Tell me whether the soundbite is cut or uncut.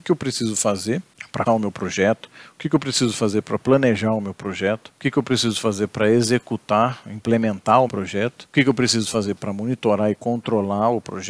cut